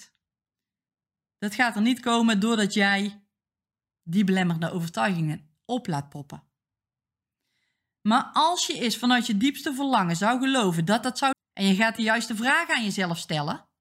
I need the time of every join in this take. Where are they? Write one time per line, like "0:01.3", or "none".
0:11.3